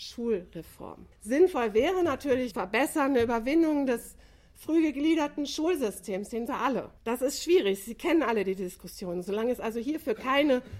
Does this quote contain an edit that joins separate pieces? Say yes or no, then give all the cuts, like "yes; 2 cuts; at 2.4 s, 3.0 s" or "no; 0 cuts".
yes; 4 cuts; at 1.1 s, 2.5 s, 6.5 s, 7.0 s